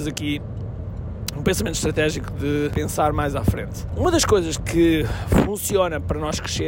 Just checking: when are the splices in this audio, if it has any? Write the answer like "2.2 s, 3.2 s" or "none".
none